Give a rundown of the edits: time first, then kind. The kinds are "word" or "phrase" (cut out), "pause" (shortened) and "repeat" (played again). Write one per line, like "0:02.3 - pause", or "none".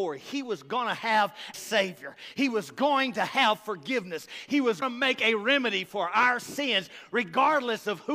0:01.5 - word
0:04.8 - word